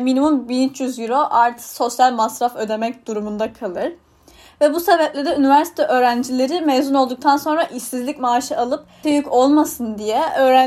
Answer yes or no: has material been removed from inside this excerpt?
yes